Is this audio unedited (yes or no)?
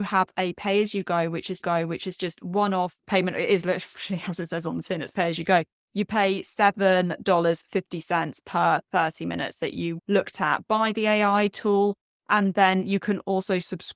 no